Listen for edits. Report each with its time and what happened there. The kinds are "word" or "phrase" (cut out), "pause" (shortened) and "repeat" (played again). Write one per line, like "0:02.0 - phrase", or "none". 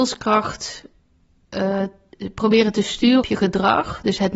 0:03.2 - word